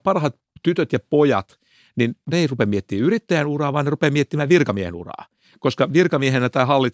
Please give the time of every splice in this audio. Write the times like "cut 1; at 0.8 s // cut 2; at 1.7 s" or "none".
none